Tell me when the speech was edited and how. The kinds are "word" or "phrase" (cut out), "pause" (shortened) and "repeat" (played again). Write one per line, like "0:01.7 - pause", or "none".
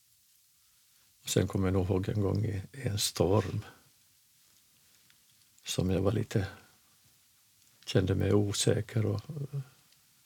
none